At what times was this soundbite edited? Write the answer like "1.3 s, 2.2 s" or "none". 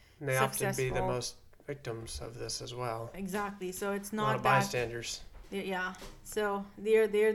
none